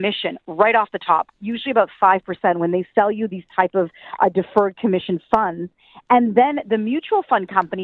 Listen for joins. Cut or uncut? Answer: uncut